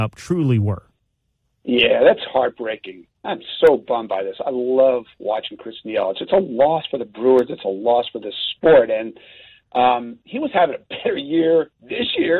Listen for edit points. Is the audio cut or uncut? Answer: uncut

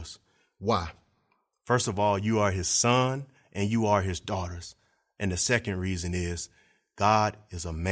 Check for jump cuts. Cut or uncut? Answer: uncut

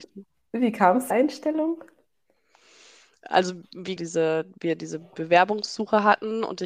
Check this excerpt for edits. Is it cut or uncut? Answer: cut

